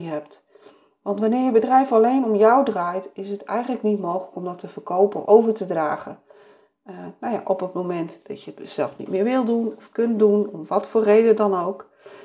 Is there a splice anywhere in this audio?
yes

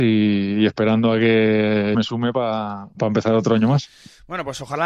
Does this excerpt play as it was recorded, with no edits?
no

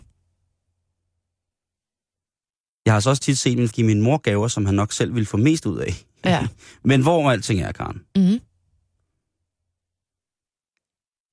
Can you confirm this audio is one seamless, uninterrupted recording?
no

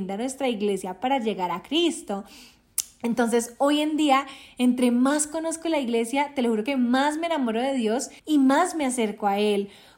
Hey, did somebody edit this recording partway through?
yes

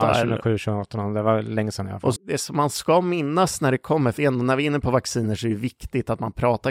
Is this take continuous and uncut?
no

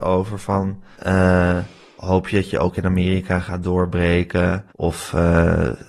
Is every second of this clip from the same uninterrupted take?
no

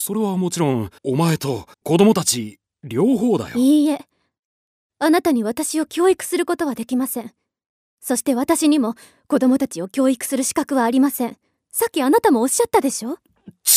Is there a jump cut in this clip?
yes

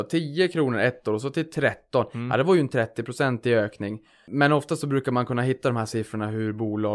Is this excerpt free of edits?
yes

